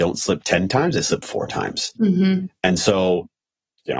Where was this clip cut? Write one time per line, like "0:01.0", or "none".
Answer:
0:01.9